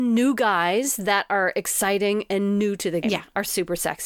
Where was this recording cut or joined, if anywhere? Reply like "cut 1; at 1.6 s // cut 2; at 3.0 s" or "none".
cut 1; at 3.0 s